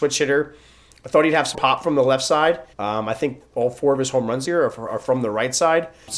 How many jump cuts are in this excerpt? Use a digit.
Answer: 4